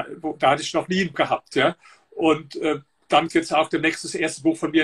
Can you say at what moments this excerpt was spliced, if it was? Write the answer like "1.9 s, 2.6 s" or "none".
1.1 s, 3.3 s